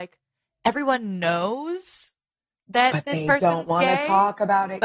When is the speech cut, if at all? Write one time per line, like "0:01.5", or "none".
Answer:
none